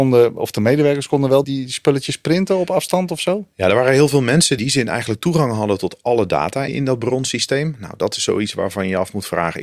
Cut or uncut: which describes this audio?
cut